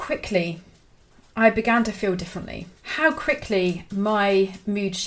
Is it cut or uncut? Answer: cut